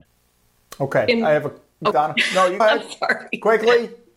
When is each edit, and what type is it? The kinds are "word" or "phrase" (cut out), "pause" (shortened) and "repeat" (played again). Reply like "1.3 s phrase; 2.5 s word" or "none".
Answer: 1.9 s word; 2.6 s word